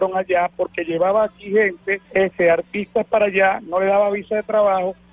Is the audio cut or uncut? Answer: cut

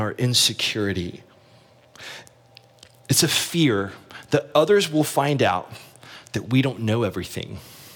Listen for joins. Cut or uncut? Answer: uncut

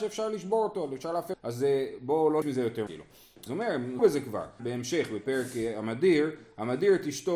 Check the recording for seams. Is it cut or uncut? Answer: cut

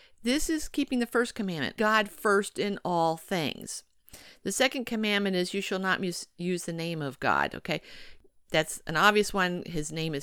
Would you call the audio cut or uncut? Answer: cut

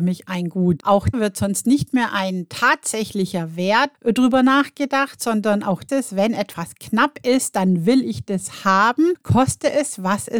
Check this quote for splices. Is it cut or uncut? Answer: cut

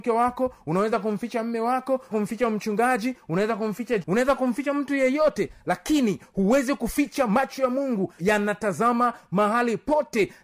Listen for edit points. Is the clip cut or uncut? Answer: cut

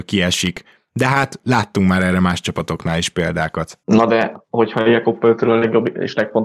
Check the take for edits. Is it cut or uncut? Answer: cut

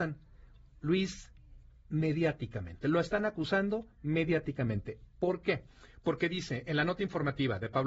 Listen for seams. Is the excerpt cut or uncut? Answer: uncut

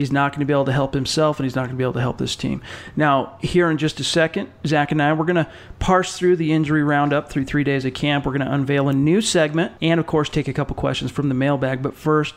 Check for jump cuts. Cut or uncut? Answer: cut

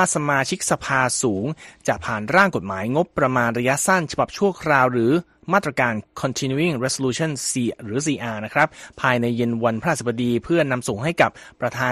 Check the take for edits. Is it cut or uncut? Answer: uncut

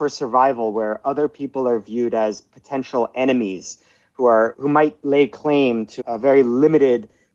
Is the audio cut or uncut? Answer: cut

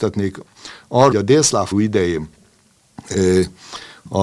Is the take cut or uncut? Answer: cut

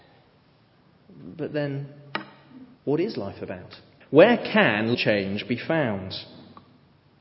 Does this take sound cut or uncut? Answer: cut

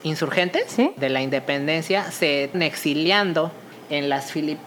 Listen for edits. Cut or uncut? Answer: cut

